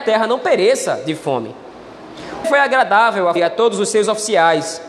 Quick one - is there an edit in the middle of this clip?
yes; 2 cuts; at 2.4 s, 3.4 s

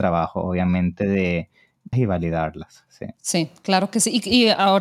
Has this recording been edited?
yes; 2 cuts; at 1.9 s, 3.2 s

